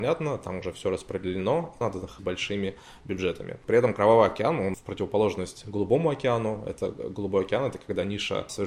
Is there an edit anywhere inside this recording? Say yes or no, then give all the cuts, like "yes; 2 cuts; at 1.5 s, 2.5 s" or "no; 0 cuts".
yes; 3 cuts; at 1.8 s, 2.2 s, 4.7 s